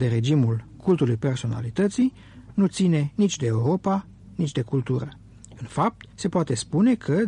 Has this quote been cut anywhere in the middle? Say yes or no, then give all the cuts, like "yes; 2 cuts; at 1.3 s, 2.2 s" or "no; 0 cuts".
yes; 1 cut; at 6.1 s